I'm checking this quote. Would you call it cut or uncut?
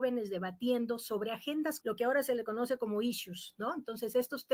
cut